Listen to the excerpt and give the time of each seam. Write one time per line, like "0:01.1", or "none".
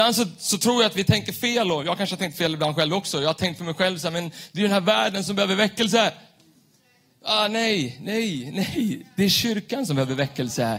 none